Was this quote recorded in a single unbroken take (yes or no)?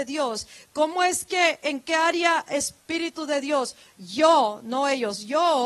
yes